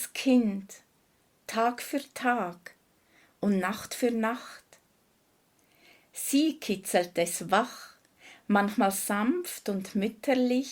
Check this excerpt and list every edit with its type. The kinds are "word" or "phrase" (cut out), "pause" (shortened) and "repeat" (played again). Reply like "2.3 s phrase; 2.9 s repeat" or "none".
none